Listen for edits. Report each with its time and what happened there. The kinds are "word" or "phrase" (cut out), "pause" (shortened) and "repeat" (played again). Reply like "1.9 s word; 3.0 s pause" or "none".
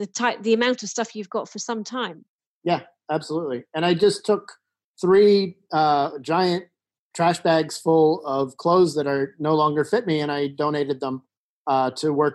none